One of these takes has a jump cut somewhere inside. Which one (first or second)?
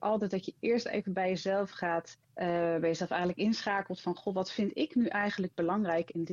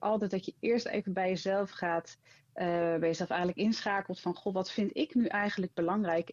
first